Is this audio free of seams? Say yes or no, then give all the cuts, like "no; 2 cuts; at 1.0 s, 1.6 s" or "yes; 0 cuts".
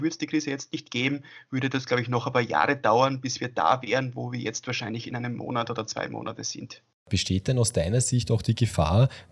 yes; 0 cuts